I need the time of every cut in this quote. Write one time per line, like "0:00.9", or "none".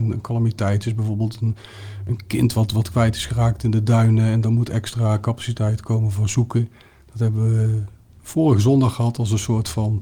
0:08.1